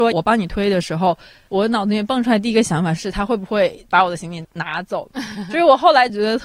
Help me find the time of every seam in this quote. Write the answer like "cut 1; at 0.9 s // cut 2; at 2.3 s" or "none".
none